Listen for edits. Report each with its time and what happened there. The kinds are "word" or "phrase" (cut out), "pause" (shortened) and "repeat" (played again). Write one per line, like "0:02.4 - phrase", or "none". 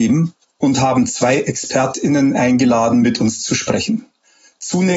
none